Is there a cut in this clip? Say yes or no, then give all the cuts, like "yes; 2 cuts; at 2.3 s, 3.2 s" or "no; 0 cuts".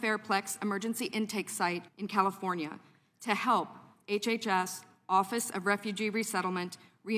yes; 1 cut; at 1.9 s